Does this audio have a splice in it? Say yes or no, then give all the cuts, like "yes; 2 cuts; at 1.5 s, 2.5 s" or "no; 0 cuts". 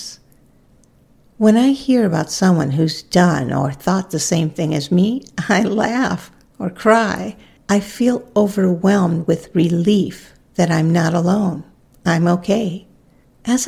yes; 1 cut; at 7.6 s